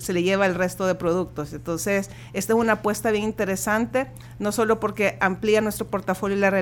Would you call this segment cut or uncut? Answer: uncut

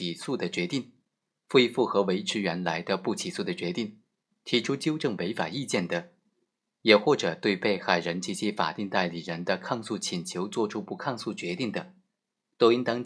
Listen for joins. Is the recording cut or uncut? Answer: uncut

